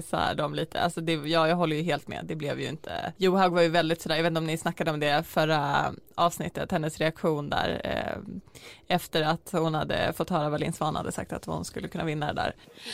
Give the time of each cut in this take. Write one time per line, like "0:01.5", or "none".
0:03.2